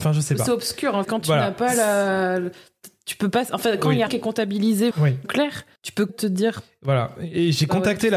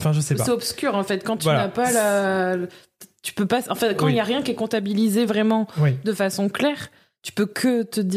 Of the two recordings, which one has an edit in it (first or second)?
first